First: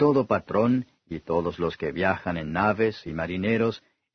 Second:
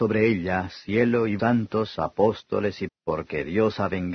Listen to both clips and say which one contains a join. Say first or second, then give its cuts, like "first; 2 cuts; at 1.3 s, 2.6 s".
second; 2 cuts; at 1.4 s, 2.9 s